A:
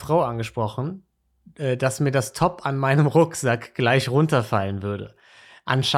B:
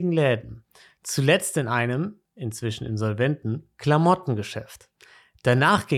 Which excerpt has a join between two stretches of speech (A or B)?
B